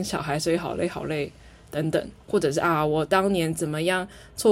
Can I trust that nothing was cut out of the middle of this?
yes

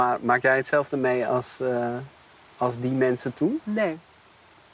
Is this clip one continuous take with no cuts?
yes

